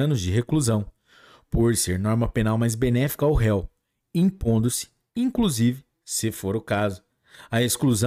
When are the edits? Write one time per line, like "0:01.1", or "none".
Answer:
none